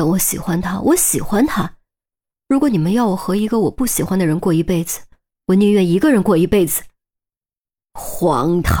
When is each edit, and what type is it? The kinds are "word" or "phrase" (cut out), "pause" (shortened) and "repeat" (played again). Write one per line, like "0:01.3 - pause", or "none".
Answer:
none